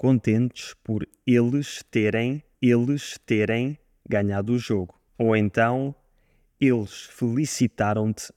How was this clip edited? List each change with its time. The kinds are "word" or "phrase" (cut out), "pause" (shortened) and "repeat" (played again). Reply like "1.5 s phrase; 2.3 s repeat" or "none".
2.5 s repeat; 5.1 s pause